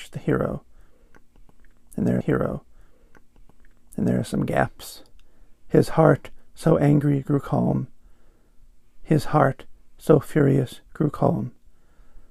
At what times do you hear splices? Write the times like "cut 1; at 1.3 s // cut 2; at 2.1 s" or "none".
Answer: cut 1; at 2.2 s